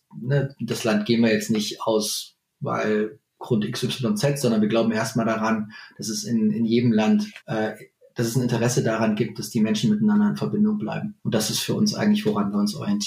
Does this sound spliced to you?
yes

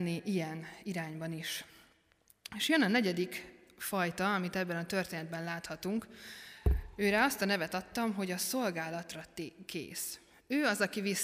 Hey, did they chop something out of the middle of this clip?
no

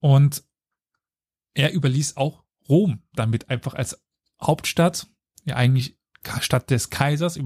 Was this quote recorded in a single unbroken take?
yes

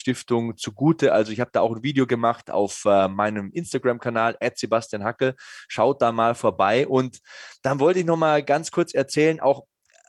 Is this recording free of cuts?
yes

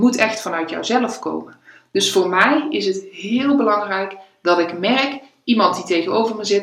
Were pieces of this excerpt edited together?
no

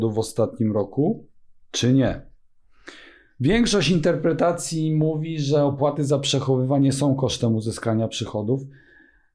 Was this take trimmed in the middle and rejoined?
no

